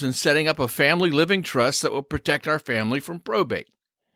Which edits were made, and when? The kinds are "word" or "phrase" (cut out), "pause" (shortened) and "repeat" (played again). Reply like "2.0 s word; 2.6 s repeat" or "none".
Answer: none